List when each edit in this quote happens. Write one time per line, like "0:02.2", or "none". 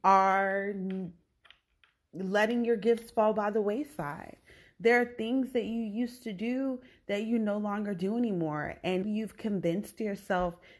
0:09.0